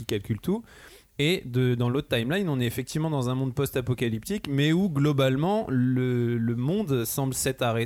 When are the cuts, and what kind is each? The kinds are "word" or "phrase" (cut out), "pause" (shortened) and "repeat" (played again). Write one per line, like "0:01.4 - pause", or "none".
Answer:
none